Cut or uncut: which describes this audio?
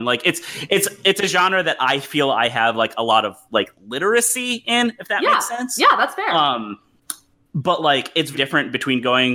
cut